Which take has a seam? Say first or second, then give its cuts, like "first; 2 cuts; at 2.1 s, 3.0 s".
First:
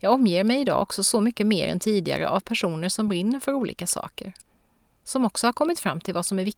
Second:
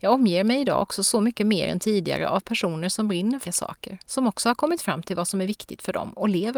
second; 2 cuts; at 3.4 s, 4.0 s